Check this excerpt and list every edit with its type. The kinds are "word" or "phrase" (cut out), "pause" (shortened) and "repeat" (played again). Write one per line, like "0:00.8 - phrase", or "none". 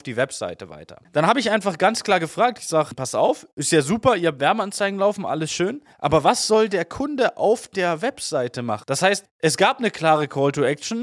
0:05.9 - pause

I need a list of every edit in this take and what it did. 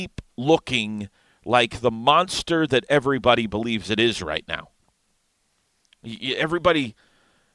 none

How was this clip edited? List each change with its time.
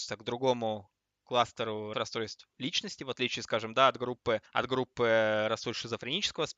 0:01.9 - word
0:04.5 - pause

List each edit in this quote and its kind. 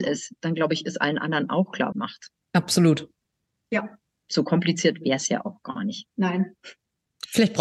0:01.9 - phrase
0:03.3 - pause

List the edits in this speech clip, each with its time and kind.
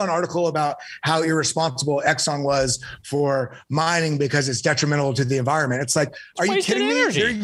none

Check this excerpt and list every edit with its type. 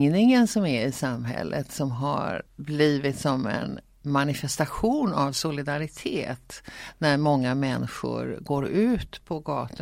0:02.5 - pause

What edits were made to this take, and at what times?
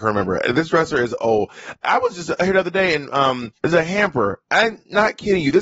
0:03.6 - pause

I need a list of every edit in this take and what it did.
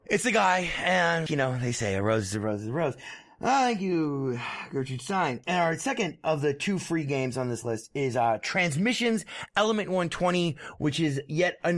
0:01.3 - word

